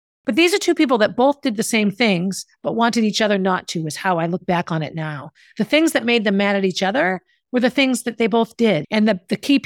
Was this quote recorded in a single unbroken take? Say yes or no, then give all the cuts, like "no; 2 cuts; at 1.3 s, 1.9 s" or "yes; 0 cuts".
yes; 0 cuts